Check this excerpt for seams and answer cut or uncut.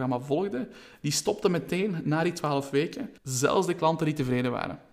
cut